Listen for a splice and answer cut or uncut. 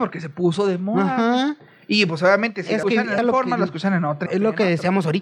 cut